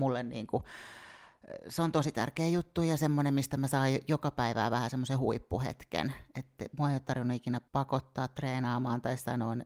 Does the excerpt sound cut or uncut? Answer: cut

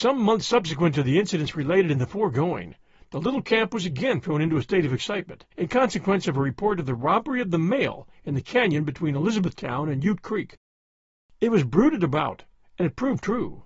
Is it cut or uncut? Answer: cut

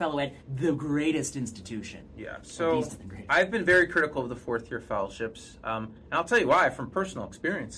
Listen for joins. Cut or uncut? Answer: cut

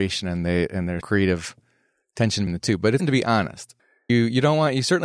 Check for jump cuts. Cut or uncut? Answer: cut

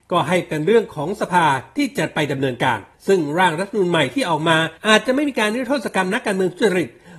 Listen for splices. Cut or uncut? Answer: cut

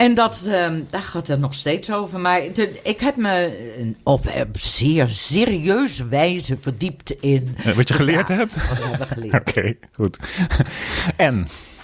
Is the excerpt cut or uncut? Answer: uncut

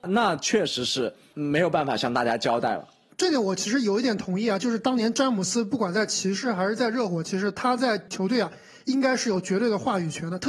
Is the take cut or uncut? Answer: uncut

